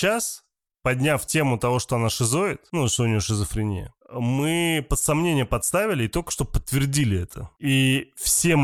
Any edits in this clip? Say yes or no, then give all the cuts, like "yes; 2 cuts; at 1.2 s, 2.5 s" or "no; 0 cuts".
no; 0 cuts